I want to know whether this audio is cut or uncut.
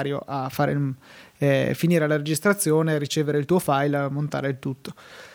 uncut